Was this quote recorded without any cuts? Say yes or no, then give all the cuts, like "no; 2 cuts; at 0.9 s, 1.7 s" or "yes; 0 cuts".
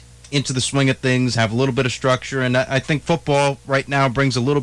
yes; 0 cuts